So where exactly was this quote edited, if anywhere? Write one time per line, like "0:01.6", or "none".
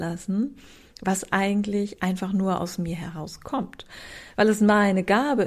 none